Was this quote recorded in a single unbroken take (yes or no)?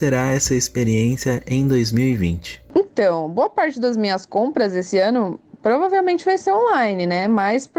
yes